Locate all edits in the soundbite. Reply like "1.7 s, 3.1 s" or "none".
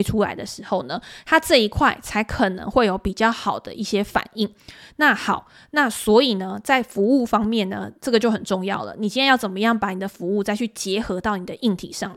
none